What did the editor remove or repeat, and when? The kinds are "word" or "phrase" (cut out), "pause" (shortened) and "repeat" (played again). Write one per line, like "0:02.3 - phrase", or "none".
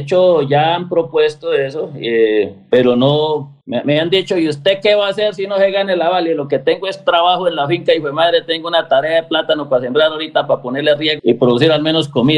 0:03.6 - pause
0:11.2 - word